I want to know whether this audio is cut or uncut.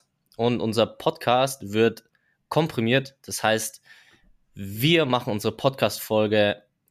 uncut